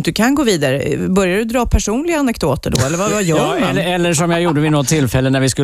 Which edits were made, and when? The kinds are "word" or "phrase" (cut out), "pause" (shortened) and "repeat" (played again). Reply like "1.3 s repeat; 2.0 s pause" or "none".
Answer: none